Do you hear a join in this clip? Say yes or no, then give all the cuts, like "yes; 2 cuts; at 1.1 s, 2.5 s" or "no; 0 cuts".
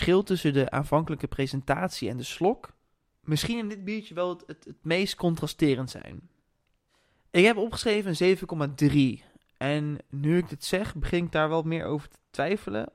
no; 0 cuts